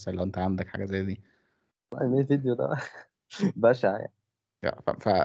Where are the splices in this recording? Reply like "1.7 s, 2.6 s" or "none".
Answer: none

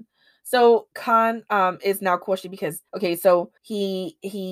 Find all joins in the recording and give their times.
0.9 s, 2.9 s, 3.6 s

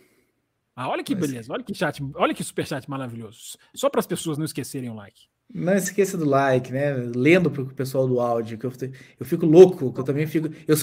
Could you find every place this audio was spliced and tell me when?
none

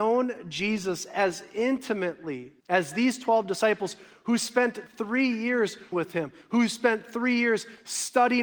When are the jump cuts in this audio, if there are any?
2.6 s, 5.9 s

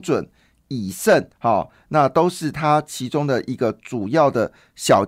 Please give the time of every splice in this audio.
1.3 s

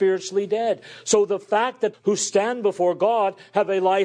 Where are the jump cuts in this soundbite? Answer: 1.9 s

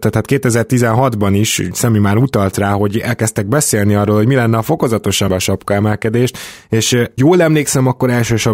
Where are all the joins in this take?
5.3 s, 7.2 s

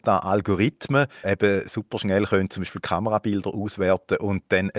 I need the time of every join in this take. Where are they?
1.2 s

